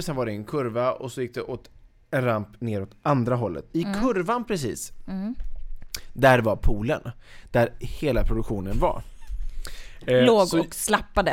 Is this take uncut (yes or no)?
yes